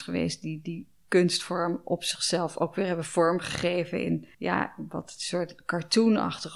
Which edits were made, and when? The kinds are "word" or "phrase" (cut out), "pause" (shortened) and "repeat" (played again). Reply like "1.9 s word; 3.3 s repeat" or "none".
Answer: 4.3 s pause